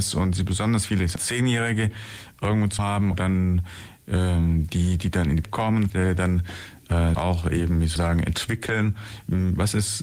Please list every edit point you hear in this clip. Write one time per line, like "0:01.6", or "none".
0:01.2
0:02.8
0:03.1
0:05.4
0:05.9
0:07.1
0:08.0